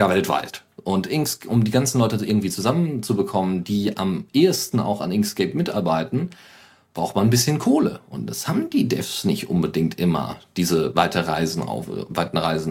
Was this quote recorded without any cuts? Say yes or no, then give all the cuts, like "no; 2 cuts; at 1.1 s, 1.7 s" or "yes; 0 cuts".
yes; 0 cuts